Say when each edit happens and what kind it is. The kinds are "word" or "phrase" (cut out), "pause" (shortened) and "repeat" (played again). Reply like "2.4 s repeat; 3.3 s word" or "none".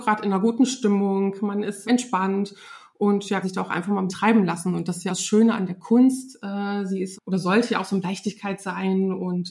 1.8 s word; 3.4 s word; 4.1 s word; 5.1 s word; 7.1 s word; 8.0 s word